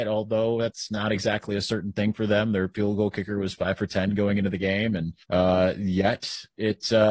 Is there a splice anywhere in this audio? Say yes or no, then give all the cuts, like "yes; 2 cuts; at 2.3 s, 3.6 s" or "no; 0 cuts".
yes; 1 cut; at 5.2 s